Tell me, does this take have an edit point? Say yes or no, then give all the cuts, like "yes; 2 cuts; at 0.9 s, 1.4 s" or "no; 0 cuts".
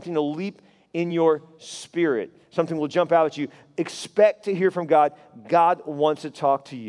no; 0 cuts